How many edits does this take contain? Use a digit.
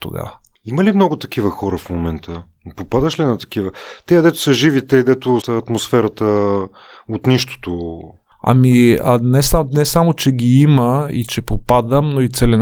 1